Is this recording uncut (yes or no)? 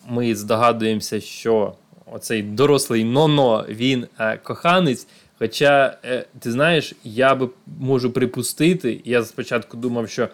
yes